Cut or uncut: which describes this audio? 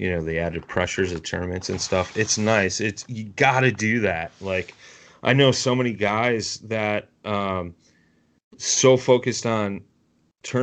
uncut